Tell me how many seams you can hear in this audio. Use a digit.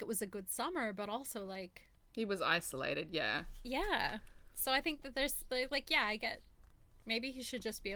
0